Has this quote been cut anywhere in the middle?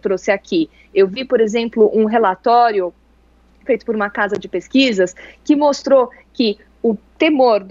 no; 0 cuts

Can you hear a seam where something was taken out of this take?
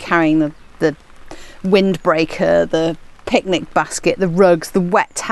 no; 0 cuts

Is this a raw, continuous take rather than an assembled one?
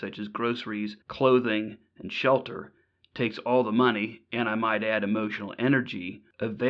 no; 1 cut; at 1.0 s

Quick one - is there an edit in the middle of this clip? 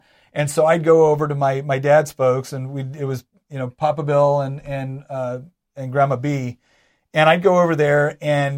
no; 0 cuts

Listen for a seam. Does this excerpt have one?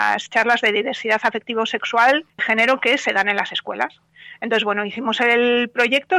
yes; 1 cut; at 2.4 s

